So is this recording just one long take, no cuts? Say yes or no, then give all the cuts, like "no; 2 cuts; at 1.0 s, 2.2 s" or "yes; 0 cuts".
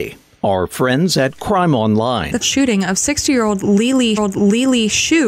no; 2 cuts; at 2.4 s, 4.2 s